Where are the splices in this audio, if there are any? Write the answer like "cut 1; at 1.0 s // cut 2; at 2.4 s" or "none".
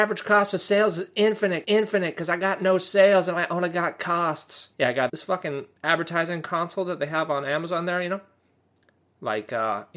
cut 1; at 1.6 s // cut 2; at 4.7 s // cut 3; at 5.1 s // cut 4; at 5.8 s